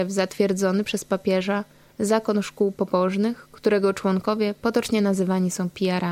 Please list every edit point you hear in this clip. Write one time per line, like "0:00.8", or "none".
none

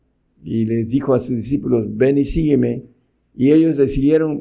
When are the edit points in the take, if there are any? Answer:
none

